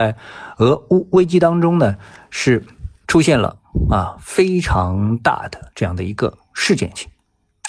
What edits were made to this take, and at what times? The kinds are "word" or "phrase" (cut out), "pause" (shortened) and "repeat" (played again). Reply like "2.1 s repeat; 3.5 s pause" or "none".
3.0 s pause